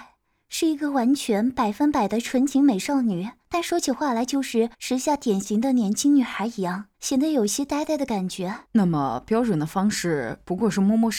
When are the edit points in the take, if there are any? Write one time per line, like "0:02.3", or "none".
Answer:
0:03.4
0:04.7
0:06.9
0:08.7